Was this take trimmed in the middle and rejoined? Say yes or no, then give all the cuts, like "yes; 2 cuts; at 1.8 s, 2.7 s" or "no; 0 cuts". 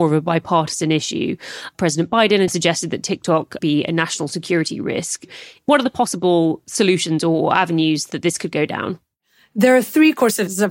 yes; 2 cuts; at 2.5 s, 3.6 s